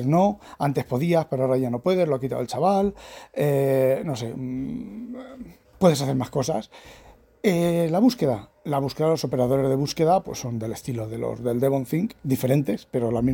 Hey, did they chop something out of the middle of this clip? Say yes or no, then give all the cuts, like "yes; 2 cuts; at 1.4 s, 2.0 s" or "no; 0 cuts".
yes; 1 cut; at 5.6 s